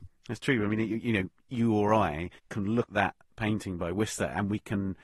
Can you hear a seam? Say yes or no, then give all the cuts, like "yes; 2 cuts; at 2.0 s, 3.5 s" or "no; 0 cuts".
yes; 2 cuts; at 2.4 s, 2.9 s